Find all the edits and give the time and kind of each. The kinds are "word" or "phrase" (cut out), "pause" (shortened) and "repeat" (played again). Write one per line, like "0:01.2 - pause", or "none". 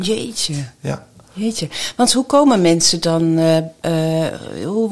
none